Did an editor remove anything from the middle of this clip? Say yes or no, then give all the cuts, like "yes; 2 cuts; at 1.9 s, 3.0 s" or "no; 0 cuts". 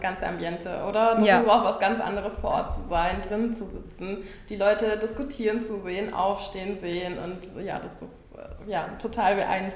no; 0 cuts